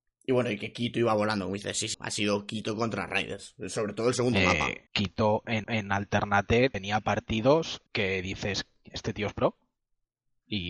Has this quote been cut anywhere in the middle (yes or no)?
yes